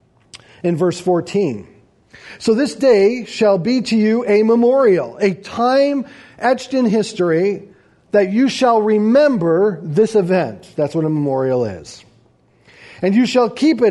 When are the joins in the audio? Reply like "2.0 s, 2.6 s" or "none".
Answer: none